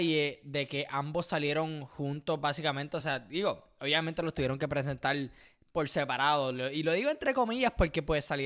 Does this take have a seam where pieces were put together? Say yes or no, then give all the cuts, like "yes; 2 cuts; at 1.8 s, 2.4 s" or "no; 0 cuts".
no; 0 cuts